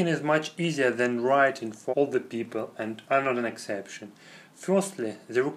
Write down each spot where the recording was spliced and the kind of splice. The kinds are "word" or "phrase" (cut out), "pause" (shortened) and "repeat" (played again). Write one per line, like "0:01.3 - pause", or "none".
0:01.9 - word

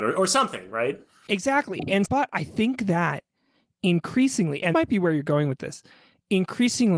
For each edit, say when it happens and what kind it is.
0:02.0 - word
0:04.7 - word

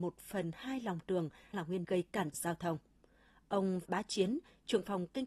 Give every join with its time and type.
0:01.5 - word
0:01.8 - word
0:02.3 - word
0:03.8 - word

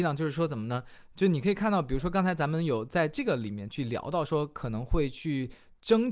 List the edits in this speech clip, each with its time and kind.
none

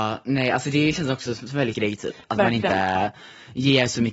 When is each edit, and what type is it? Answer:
0:01.7 - word

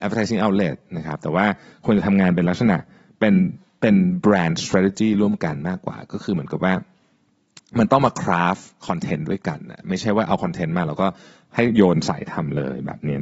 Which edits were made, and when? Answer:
none

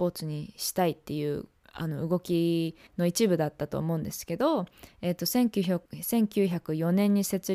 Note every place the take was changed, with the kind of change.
0:01.6 - pause
0:02.9 - pause
0:05.9 - pause

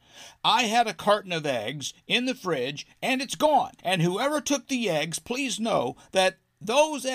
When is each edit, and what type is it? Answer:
0:03.8 - pause

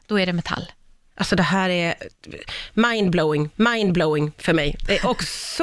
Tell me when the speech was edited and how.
0:03.5 - repeat

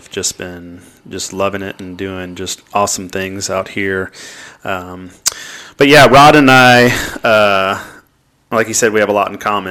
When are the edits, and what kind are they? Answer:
none

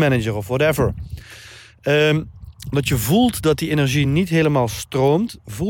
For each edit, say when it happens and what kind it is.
none

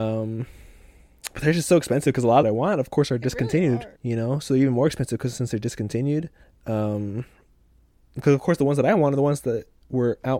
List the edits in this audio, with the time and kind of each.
0:02.4 - phrase
0:04.0 - pause
0:06.4 - pause
0:08.2 - word

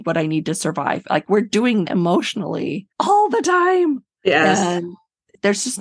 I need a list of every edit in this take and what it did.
0:01.8 - word
0:02.9 - pause

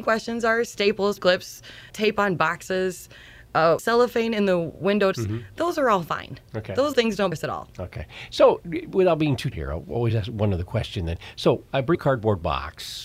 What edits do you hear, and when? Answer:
0:01.2 - word
0:01.9 - word
0:03.8 - word
0:05.1 - word
0:06.9 - word
0:07.3 - word
0:09.5 - word
0:11.9 - word

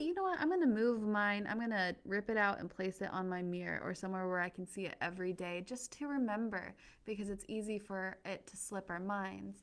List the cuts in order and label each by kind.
none

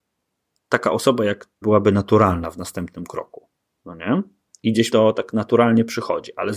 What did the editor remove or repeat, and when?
0:01.6 - word
0:04.9 - word

